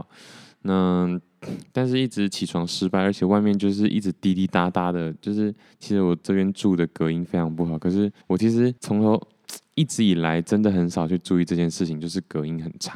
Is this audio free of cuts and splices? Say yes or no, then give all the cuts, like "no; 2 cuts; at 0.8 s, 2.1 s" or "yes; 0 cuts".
no; 2 cuts; at 8.2 s, 8.8 s